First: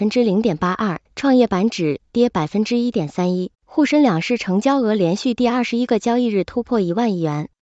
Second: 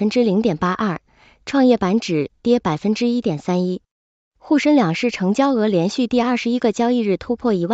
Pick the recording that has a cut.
first; 2 cuts; at 1.1 s, 3.5 s

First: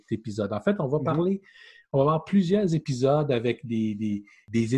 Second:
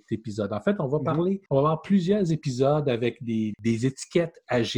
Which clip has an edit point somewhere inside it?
second; 2 cuts; at 1.5 s, 3.5 s

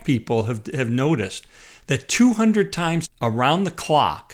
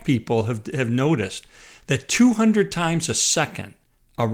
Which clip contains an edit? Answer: first; 1 cut; at 3.0 s

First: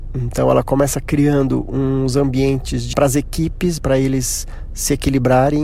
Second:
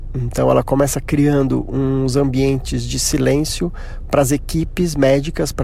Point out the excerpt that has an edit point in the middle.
first; 2 cuts; at 2.9 s, 3.8 s

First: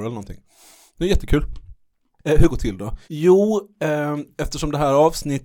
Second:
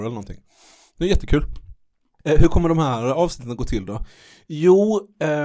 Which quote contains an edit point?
first; 2 cuts; at 2.5 s, 3.0 s

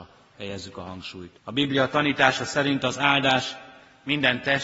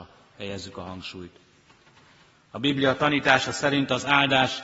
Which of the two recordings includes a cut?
first; 1 cut; at 1.4 s

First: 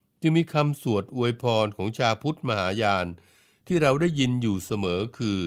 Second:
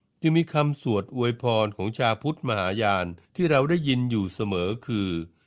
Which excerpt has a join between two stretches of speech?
second; 1 cut; at 3.2 s

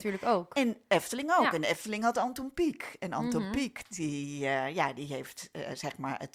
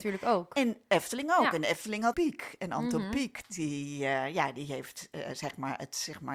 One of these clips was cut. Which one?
second; 1 cut; at 2.1 s

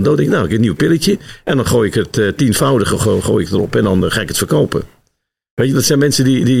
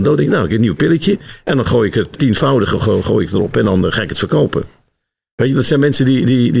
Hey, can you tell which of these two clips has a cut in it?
second; 1 cut; at 2.1 s

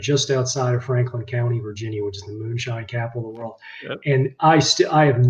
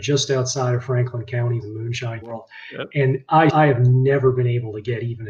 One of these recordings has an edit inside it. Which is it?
second; 3 cuts; at 1.6 s, 2.2 s, 3.5 s

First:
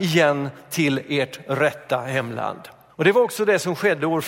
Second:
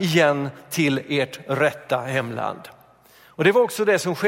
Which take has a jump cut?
first; 1 cut; at 2.9 s

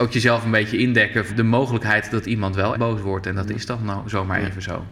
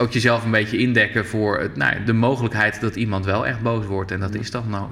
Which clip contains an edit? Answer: first; 2 cuts; at 1.3 s, 2.7 s

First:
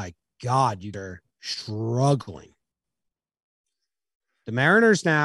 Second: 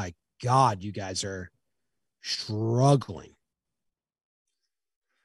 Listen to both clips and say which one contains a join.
first; 2 cuts; at 0.9 s, 1.3 s

